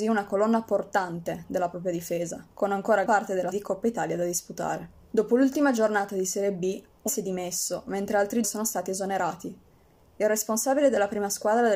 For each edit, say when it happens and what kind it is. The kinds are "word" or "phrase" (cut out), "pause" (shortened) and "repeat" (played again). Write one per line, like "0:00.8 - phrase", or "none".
0:02.5 - pause
0:03.0 - word
0:03.5 - phrase
0:05.1 - pause
0:07.1 - word
0:08.4 - word